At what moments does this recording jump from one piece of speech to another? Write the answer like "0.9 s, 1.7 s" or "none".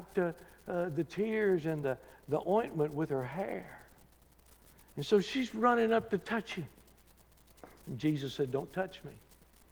none